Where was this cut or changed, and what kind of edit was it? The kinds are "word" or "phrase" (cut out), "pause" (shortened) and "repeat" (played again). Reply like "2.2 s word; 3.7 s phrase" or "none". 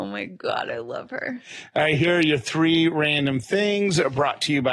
none